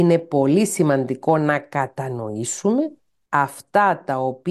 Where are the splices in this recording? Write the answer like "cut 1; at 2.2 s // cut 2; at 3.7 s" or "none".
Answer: cut 1; at 3.3 s

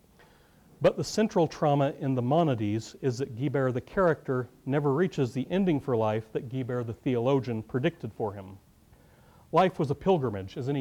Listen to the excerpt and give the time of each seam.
none

